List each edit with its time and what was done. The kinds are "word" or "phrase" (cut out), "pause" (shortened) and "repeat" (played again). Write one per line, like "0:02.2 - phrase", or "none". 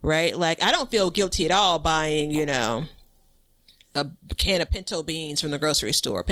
0:04.2 - pause